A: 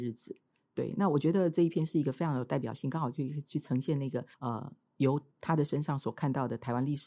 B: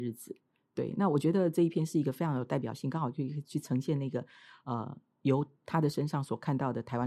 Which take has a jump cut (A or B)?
A